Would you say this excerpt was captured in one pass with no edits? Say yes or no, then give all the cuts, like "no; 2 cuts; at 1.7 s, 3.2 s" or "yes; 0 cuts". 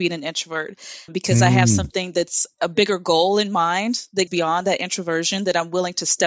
no; 2 cuts; at 1.1 s, 4.3 s